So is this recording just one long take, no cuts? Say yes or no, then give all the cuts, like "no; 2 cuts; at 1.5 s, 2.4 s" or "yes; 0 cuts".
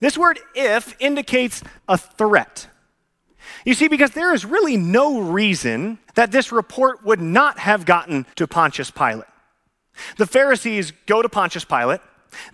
no; 3 cuts; at 1.8 s, 6.1 s, 8.3 s